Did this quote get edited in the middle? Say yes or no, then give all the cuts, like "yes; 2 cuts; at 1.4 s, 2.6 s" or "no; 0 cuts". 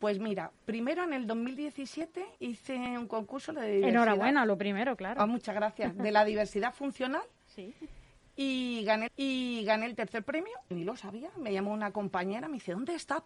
yes; 3 cuts; at 2.4 s, 9.1 s, 10.7 s